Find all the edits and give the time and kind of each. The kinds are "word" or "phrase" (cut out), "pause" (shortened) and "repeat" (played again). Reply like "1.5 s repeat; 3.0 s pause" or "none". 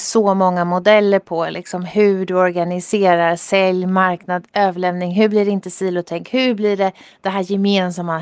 none